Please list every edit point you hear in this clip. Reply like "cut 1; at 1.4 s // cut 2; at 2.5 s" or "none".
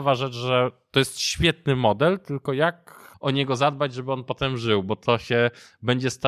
cut 1; at 3.1 s